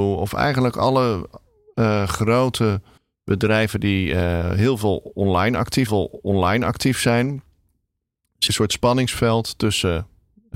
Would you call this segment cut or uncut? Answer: cut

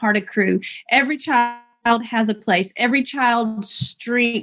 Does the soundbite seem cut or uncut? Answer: uncut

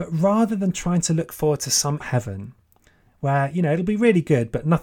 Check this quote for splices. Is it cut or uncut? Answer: cut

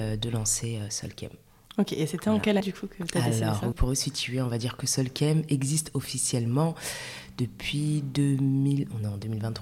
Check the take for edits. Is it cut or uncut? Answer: cut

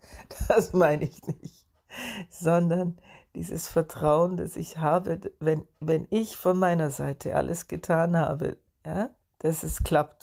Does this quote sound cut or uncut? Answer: uncut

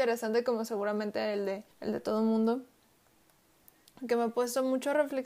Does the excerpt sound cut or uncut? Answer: cut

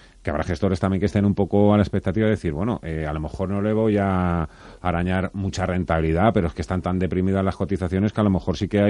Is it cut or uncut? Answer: uncut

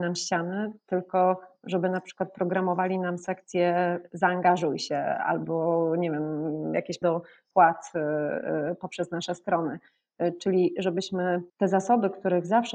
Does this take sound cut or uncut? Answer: cut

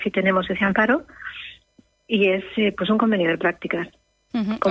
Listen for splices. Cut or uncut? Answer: uncut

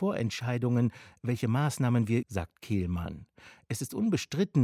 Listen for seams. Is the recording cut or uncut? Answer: cut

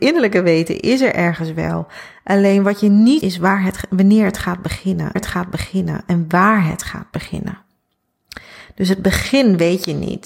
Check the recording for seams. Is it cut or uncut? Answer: cut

